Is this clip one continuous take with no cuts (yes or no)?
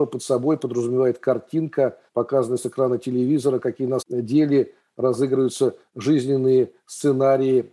no